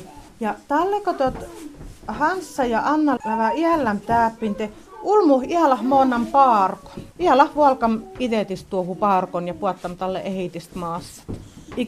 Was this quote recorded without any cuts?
no; 2 cuts; at 3.2 s, 7.1 s

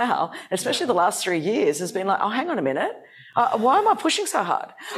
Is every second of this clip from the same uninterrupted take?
yes; 0 cuts

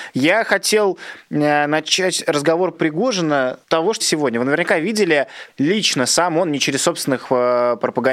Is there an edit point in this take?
yes; 4 cuts; at 2.7 s, 3.6 s, 4.0 s, 5.5 s

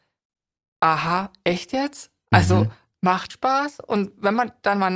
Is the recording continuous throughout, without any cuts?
no; 1 cut; at 3.3 s

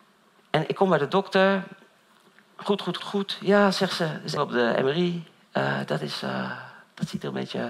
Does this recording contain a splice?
yes; 2 cuts; at 3.0 s, 4.4 s

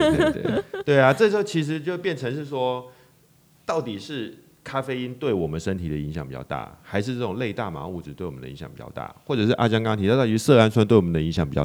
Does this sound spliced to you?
no; 0 cuts

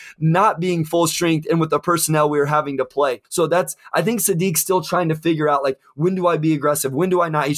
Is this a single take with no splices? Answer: no; 1 cut; at 3.2 s

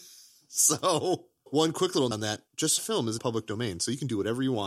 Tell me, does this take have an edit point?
yes; 5 cuts; at 1.5 s, 2.1 s, 2.5 s, 2.8 s, 3.2 s

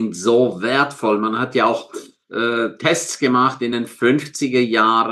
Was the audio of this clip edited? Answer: no; 0 cuts

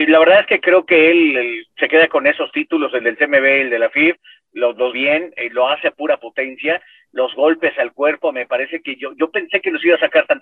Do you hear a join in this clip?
yes; 1 cut; at 4.9 s

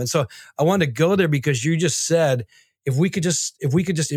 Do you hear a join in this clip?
no; 0 cuts

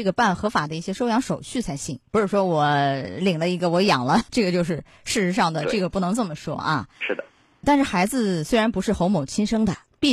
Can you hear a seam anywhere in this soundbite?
yes; 3 cuts; at 4.3 s, 7.0 s, 7.6 s

